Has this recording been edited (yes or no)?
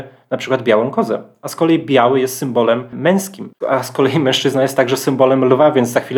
no